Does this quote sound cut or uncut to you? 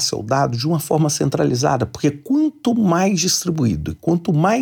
uncut